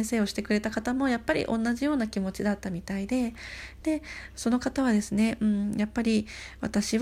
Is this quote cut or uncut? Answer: uncut